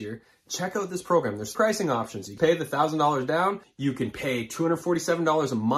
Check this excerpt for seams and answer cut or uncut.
cut